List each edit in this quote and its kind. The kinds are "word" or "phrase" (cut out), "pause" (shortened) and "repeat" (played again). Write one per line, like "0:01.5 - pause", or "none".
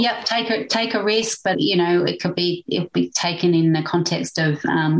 0:01.5 - word